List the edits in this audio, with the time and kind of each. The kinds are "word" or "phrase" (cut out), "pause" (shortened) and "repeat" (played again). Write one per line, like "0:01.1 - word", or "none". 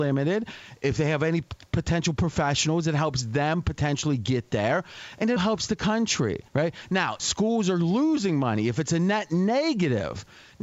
0:05.4 - word
0:06.5 - pause
0:07.2 - phrase